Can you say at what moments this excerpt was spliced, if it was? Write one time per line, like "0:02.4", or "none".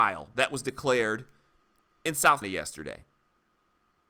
0:02.4